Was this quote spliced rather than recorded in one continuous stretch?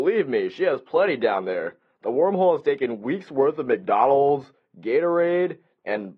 no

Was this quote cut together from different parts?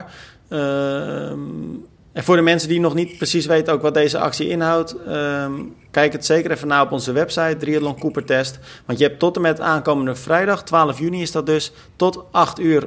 no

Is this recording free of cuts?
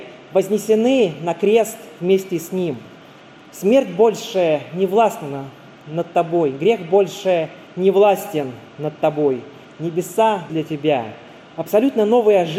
no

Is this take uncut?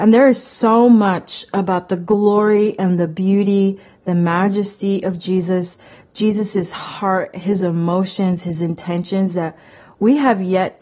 yes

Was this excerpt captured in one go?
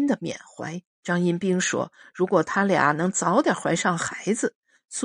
no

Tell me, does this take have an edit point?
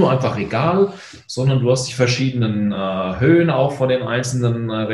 no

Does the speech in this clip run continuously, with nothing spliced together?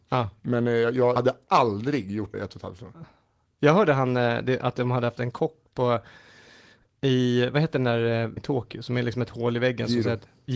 no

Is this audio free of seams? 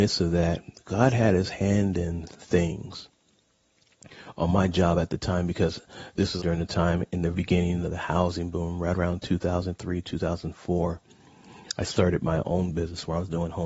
no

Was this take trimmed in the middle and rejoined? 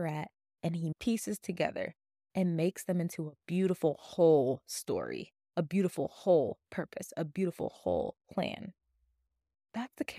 yes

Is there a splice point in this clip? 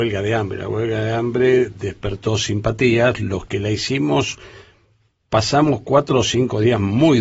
no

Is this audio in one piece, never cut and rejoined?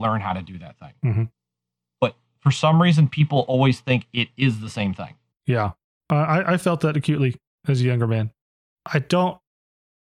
yes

